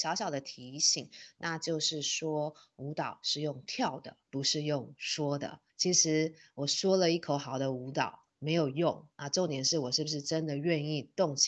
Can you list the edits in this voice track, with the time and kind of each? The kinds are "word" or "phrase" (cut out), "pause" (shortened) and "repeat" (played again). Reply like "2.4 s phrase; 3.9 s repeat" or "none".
4.2 s pause; 5.7 s pause; 8.3 s pause; 9.1 s pause